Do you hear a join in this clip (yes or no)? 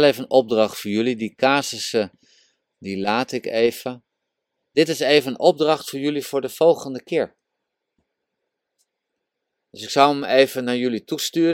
no